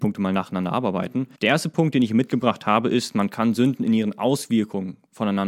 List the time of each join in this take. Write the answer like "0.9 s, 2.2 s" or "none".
1.4 s